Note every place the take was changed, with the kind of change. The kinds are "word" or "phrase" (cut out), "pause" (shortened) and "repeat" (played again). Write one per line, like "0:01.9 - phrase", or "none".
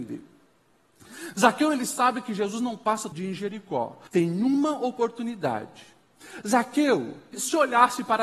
0:03.1 - word
0:04.1 - pause
0:07.3 - word